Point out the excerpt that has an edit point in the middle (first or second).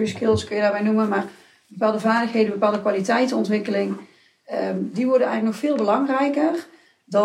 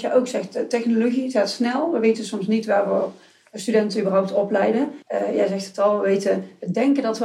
second